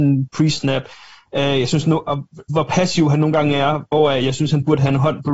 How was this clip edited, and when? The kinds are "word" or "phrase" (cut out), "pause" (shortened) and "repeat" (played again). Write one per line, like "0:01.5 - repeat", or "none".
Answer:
none